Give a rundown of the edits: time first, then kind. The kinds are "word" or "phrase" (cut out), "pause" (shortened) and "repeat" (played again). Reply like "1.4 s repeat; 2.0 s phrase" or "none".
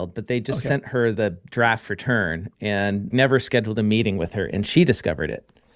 3.1 s word